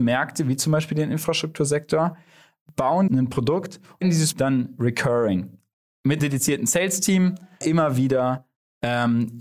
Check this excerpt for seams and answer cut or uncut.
cut